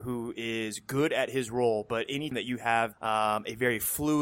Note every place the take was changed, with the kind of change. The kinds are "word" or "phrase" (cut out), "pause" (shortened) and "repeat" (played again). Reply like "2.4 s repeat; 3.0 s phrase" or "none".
2.3 s word; 2.9 s word